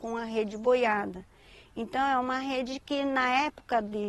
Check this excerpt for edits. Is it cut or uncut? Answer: uncut